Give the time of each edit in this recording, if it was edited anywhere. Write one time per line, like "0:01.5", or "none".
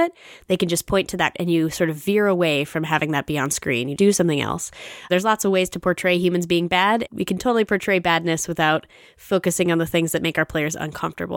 0:01.3
0:04.0
0:07.1

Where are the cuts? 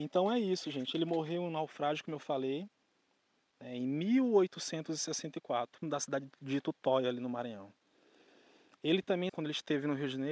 0:05.8
0:09.3

